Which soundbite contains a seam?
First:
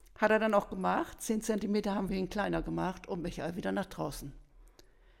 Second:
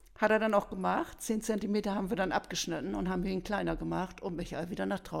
first; 1 cut; at 2.1 s

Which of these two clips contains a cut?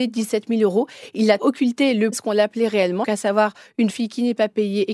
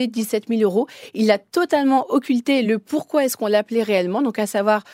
first; 4 cuts; at 1.4 s, 2.1 s, 3.0 s, 3.9 s

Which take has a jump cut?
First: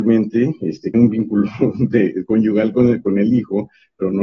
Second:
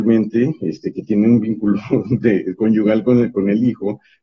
first; 1 cut; at 0.9 s

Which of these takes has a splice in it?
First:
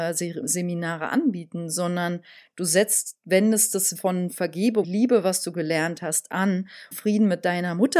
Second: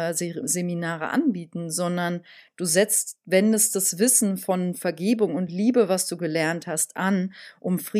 first; 3 cuts; at 4.0 s, 4.8 s, 6.9 s

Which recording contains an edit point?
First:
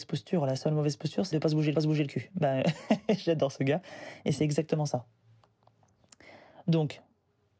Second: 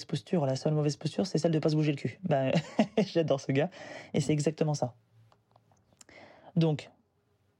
first; 2 cuts; at 1.3 s, 1.7 s

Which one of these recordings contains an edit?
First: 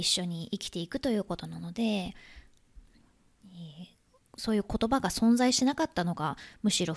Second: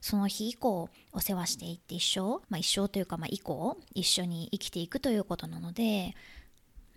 second; 1 cut; at 2.4 s

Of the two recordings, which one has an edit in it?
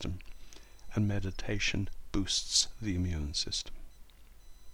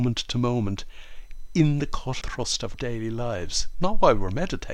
second; 2 cuts; at 2.2 s, 2.7 s

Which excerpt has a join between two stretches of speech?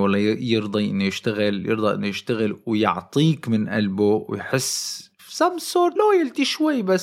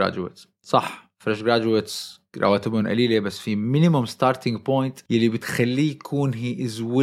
first; 1 cut; at 6.0 s

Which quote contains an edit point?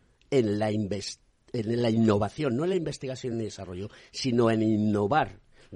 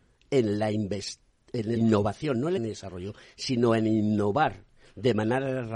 second; 2 cuts; at 1.8 s, 2.6 s

